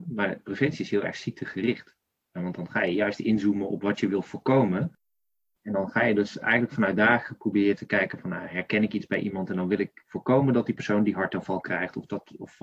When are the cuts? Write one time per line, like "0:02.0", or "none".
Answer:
none